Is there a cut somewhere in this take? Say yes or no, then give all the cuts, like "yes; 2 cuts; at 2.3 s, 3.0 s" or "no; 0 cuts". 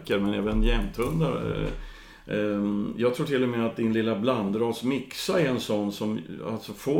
no; 0 cuts